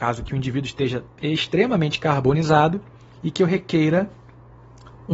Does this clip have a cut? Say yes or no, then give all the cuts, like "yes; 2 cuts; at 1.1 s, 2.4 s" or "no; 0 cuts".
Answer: no; 0 cuts